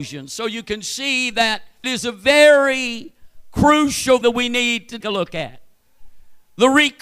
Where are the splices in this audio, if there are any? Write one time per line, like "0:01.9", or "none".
0:01.8
0:04.2
0:05.0